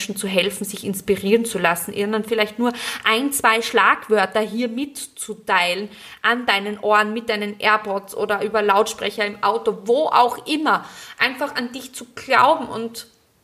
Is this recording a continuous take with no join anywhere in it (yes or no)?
yes